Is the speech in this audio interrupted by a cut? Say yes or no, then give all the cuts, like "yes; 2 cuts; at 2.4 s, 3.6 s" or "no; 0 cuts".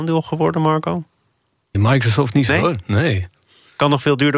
yes; 2 cuts; at 1.7 s, 2.5 s